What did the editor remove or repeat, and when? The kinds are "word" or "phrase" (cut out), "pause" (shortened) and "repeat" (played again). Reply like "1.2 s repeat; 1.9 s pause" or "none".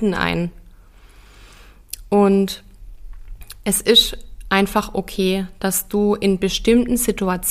none